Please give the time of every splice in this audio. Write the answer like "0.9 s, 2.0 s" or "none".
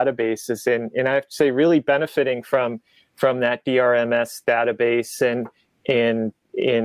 none